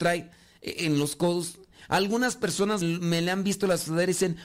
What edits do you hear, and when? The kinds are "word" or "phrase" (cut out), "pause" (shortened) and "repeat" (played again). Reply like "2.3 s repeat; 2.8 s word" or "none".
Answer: 2.8 s word

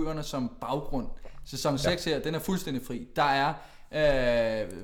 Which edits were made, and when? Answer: none

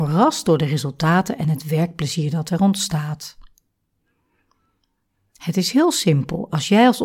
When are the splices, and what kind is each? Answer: none

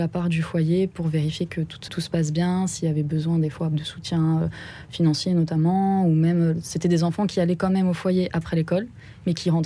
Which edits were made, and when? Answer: 1.9 s word; 3.7 s word

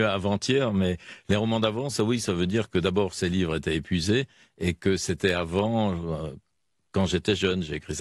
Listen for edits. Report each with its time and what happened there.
none

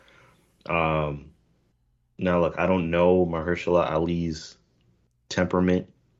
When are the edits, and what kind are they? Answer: none

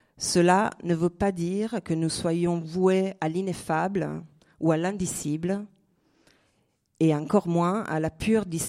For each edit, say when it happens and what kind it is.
none

